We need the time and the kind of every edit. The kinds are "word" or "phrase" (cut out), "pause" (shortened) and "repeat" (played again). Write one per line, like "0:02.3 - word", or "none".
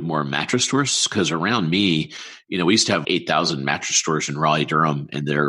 0:03.0 - word
0:04.3 - word

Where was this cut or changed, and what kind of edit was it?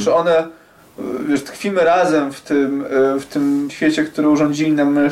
0:03.7 - word

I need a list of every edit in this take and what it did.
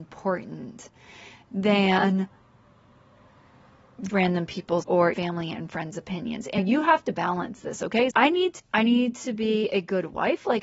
0:04.1 - word
0:04.8 - word
0:05.1 - word
0:06.6 - word
0:08.1 - word
0:08.6 - word

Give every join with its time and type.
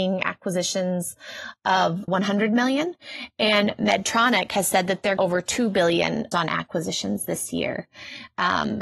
0:02.1 - word
0:05.2 - phrase
0:06.3 - word

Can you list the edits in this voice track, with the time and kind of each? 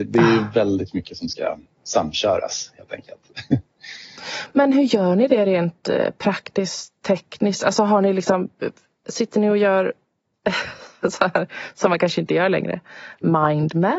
none

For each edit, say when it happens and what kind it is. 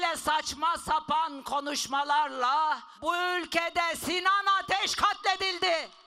0:02.9 - pause

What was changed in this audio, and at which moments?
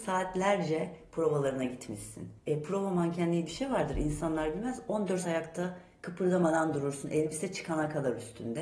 0:02.4 - pause
0:03.5 - word
0:05.2 - word

